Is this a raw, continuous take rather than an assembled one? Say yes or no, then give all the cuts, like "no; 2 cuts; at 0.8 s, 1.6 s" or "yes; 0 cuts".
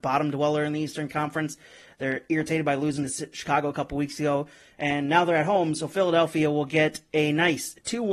yes; 0 cuts